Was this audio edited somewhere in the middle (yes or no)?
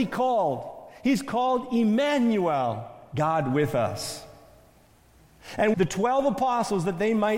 yes